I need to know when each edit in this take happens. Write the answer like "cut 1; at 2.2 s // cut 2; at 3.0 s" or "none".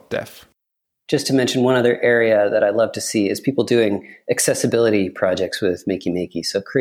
none